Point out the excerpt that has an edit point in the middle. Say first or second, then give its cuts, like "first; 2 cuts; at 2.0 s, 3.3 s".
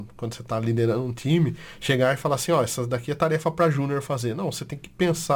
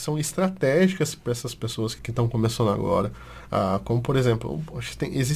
second; 1 cut; at 2.0 s